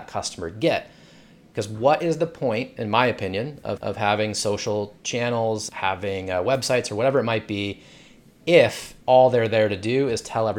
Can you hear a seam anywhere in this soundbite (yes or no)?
yes